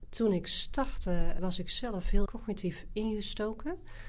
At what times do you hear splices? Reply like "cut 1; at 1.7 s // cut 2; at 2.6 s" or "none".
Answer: cut 1; at 1.4 s // cut 2; at 2.3 s